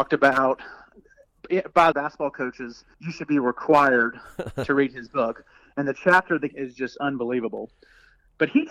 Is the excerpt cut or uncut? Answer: cut